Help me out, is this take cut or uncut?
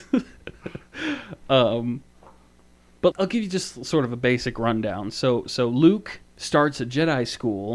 cut